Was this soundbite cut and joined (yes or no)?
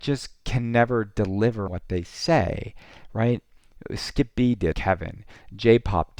yes